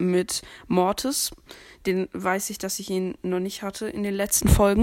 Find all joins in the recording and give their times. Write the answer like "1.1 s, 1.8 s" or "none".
none